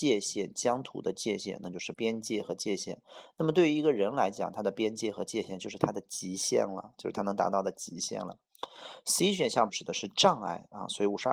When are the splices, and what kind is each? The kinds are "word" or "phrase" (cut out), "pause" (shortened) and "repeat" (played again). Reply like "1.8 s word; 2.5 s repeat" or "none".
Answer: 1.9 s word; 9.7 s word